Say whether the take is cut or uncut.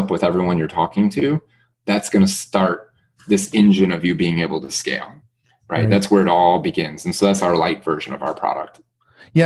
uncut